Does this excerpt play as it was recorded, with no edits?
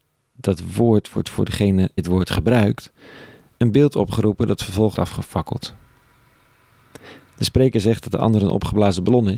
no; 2 cuts; at 2.0 s, 4.9 s

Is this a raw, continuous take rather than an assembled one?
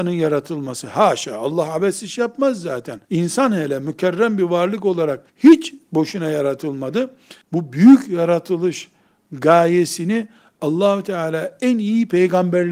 no; 3 cuts; at 3.0 s, 5.3 s, 7.4 s

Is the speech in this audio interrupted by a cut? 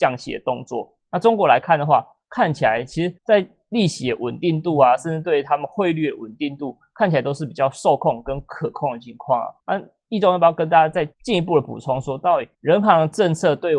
yes; 4 cuts; at 3.2 s, 9.6 s, 11.1 s, 12.5 s

